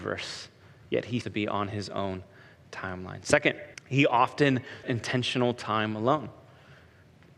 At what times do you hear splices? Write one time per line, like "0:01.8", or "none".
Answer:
0:01.2
0:03.7
0:04.8